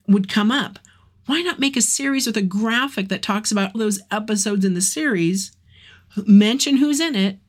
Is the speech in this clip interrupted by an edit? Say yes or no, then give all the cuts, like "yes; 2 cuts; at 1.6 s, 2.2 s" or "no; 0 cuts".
yes; 1 cut; at 3.7 s